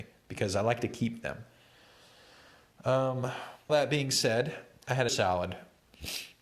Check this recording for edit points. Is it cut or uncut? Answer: cut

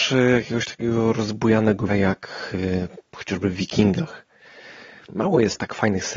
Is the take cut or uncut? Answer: cut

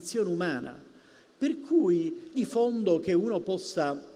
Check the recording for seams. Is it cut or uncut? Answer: cut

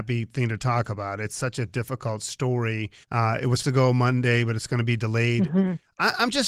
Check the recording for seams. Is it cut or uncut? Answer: cut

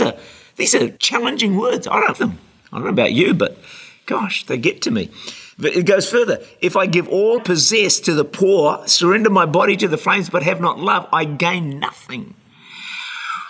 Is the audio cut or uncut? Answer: cut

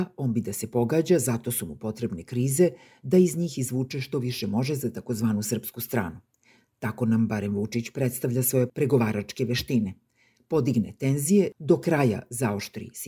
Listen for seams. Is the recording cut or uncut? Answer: uncut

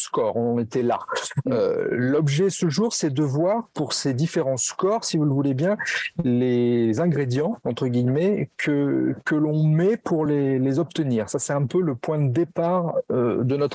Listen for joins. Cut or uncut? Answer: uncut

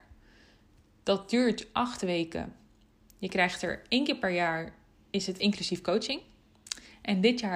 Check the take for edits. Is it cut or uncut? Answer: uncut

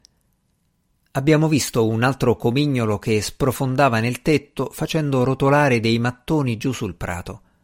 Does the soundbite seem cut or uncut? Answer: uncut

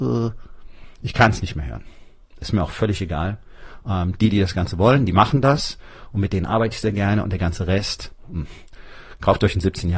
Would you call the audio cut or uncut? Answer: uncut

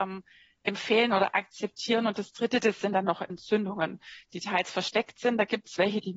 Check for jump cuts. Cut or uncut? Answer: uncut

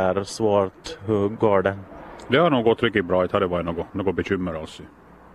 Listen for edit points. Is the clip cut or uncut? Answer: cut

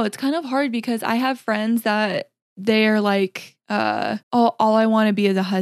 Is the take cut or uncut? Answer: cut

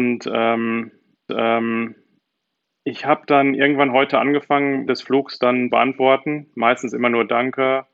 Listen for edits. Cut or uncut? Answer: cut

